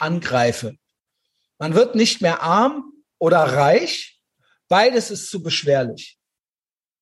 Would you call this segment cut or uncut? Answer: uncut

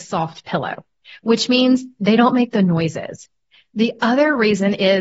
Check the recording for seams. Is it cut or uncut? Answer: uncut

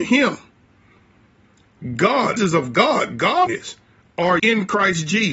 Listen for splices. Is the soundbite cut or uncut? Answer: cut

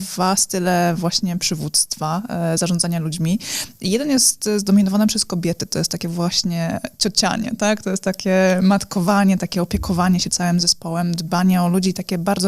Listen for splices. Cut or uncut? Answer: uncut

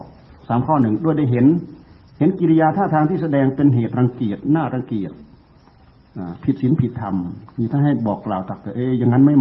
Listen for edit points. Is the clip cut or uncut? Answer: uncut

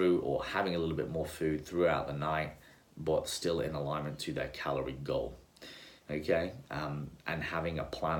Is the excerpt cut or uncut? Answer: uncut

